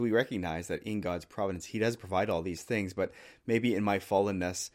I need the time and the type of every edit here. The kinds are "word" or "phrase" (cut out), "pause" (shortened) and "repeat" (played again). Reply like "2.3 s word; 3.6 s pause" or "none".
none